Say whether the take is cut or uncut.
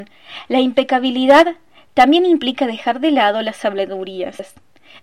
uncut